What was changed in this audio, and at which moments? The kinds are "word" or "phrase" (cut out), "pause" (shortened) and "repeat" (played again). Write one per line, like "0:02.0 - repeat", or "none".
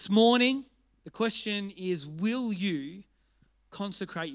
none

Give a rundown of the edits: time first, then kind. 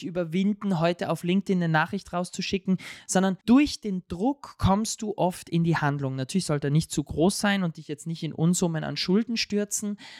0:03.4 - pause

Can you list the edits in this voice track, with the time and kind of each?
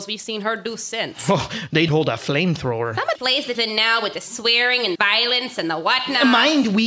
0:01.9 - word
0:03.1 - word
0:03.5 - word
0:04.9 - word

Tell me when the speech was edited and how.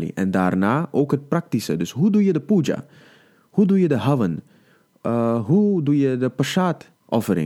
none

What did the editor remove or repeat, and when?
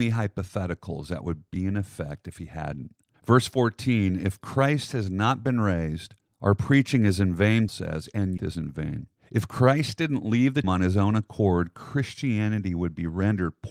0:03.1 - pause
0:06.2 - pause
0:07.7 - word
0:08.4 - phrase
0:09.2 - pause
0:10.6 - word

